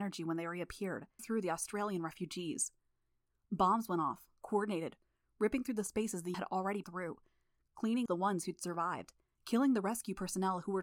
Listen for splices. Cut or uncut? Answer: cut